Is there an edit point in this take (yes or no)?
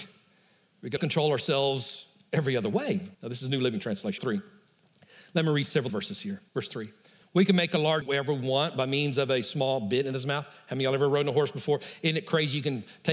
yes